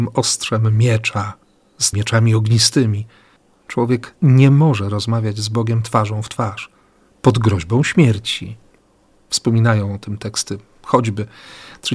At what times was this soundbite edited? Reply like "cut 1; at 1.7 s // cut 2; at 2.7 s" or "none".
cut 1; at 1.9 s